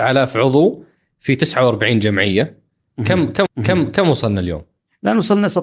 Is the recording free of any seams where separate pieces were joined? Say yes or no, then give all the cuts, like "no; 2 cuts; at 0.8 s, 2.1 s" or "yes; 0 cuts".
no; 1 cut; at 3.5 s